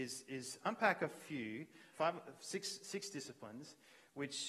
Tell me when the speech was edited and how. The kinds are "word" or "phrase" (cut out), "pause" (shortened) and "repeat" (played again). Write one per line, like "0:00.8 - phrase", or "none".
0:01.9 - word